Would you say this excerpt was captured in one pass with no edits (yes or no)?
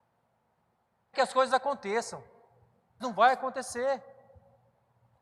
no